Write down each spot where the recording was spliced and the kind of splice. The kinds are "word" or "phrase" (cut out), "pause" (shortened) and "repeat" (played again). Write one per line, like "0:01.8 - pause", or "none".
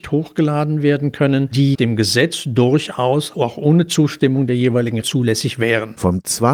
0:01.7 - word
0:03.3 - word
0:05.0 - word

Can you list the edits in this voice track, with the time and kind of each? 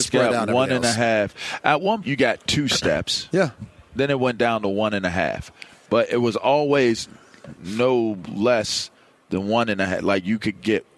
0:02.0 - word
0:07.6 - word

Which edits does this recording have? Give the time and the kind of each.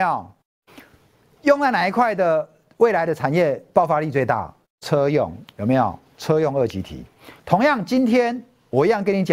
0:07.4 - pause

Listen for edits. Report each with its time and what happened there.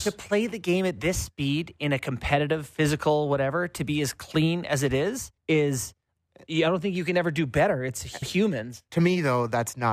0:05.4 - pause
0:08.2 - word

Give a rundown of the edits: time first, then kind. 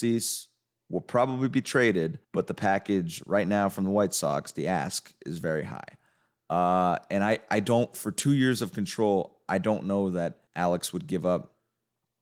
0:02.2 - pause
0:10.5 - pause

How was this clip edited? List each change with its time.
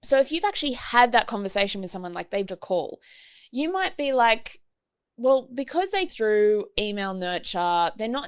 0:02.5 - word
0:06.1 - word

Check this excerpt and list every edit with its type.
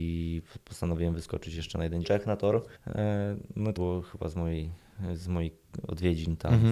0:02.0 - phrase
0:02.8 - pause
0:03.8 - word

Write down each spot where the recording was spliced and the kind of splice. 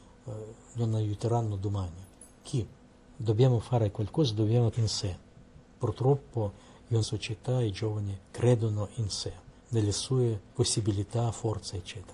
0:02.9 - pause
0:04.7 - word
0:05.7 - pause
0:07.0 - phrase
0:08.2 - pause
0:09.6 - pause
0:10.5 - pause

